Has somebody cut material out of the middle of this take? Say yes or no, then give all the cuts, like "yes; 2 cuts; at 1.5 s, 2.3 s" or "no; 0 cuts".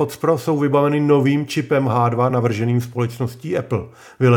no; 0 cuts